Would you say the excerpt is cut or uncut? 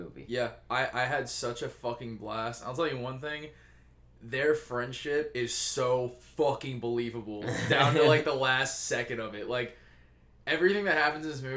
uncut